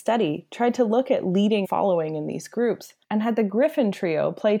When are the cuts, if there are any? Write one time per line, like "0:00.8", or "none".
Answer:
0:01.6
0:03.0